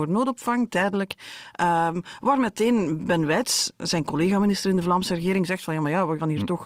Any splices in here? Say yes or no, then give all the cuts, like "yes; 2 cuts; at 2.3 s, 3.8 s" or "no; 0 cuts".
no; 0 cuts